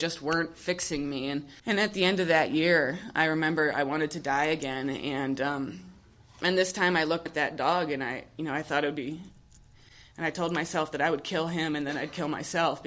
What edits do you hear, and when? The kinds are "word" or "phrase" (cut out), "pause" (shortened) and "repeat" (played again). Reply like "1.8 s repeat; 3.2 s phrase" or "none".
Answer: 1.6 s pause; 7.3 s word

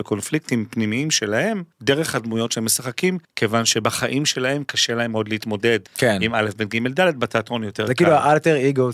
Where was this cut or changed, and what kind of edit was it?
1.7 s pause; 3.2 s pause; 5.9 s pause

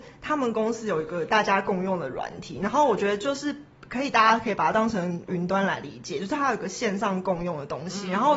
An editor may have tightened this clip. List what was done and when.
5.3 s word

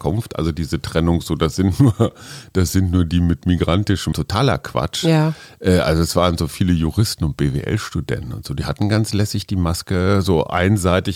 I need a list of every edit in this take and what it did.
4.1 s word

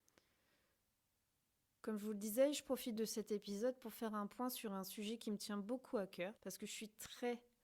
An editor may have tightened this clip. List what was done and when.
3.0 s word; 6.4 s pause

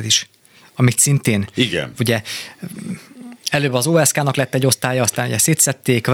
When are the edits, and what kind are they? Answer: none

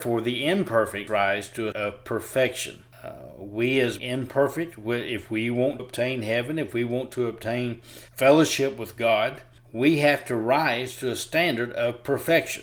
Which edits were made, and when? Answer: 1.1 s word; 1.7 s word; 2.9 s pause; 4.0 s word; 5.8 s word; 8.1 s pause; 9.6 s pause

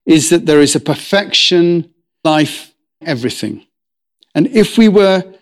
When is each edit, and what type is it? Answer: 2.2 s word; 3.0 s word

